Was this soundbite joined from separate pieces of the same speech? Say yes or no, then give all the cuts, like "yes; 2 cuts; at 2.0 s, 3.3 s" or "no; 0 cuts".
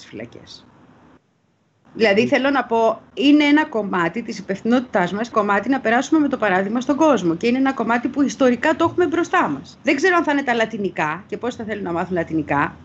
yes; 2 cuts; at 5.3 s, 9.7 s